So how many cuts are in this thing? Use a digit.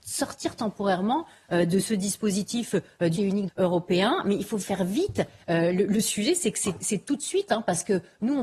2